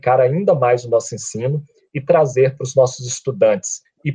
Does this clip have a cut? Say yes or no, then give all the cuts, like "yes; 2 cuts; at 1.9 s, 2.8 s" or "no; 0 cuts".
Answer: no; 0 cuts